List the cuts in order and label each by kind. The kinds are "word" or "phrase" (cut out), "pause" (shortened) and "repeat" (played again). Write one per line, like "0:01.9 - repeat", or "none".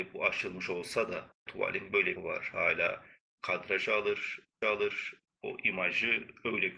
0:01.5 - word
0:02.2 - phrase
0:04.6 - repeat